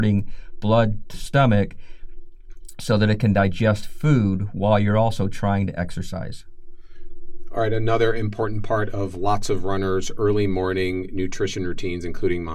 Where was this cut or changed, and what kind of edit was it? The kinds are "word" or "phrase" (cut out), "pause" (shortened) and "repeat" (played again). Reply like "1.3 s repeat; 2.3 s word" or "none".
1.1 s word

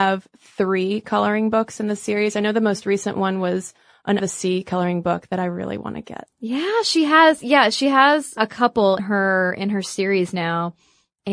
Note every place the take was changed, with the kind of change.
4.2 s word; 8.4 s word; 9.0 s word

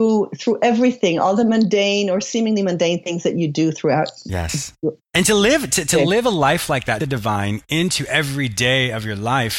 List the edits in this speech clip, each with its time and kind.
5.0 s pause; 7.0 s phrase

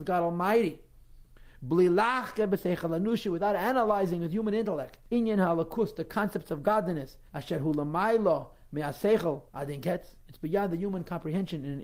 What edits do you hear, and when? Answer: 5.0 s pause; 7.3 s pause; 9.5 s pause

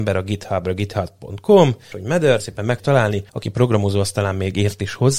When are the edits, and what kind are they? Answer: 1.9 s word; 2.4 s word; 2.8 s word; 3.3 s pause

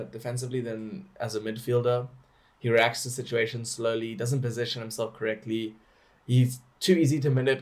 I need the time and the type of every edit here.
none

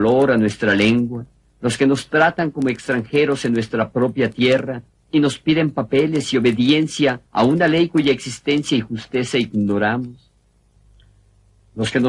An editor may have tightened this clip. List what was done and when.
7.3 s pause

